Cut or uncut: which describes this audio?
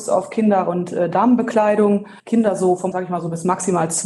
cut